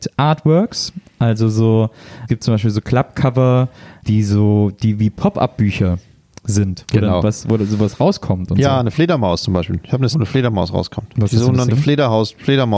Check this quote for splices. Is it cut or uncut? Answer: cut